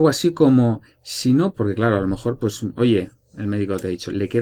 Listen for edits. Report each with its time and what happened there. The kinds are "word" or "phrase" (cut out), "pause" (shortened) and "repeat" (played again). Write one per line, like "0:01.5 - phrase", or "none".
0:01.5 - phrase